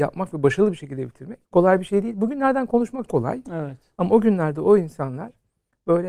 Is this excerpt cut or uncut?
cut